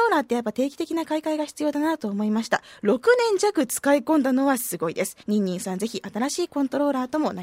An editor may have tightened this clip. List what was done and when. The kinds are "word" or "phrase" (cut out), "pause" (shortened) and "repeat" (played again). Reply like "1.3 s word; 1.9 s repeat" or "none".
5.2 s pause